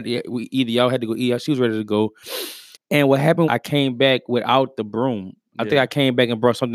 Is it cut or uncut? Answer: cut